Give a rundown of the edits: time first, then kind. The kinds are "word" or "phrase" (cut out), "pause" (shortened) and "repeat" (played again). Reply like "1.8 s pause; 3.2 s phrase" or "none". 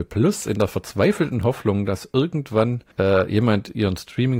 2.9 s pause